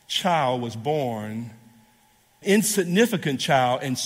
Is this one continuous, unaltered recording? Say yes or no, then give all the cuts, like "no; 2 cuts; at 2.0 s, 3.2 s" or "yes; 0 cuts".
no; 1 cut; at 2.4 s